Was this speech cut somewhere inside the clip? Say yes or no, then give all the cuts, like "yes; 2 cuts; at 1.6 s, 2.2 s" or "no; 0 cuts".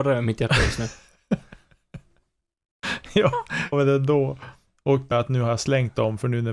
yes; 2 cuts; at 3.7 s, 5.1 s